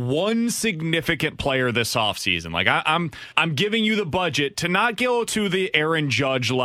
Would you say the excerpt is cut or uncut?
cut